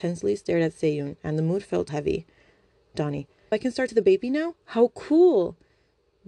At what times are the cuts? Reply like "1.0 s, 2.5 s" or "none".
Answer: 1.9 s, 3.5 s, 3.9 s